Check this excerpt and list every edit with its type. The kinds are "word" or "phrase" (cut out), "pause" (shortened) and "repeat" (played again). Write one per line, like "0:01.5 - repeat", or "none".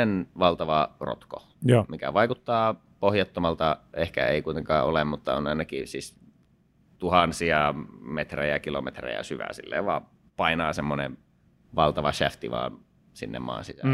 none